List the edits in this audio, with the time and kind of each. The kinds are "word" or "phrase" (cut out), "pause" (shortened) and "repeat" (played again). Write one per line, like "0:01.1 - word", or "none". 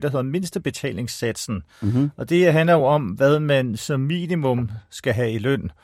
none